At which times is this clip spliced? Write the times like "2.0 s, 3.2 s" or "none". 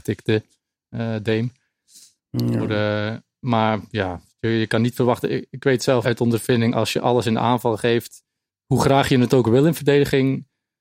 6.0 s